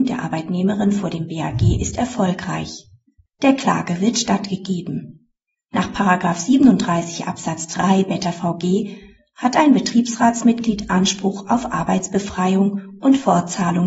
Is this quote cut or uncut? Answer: uncut